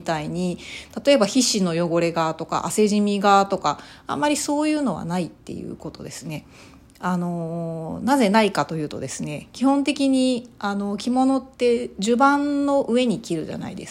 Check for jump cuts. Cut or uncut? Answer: uncut